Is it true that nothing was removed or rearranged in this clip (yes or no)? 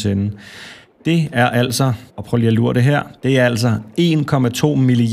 no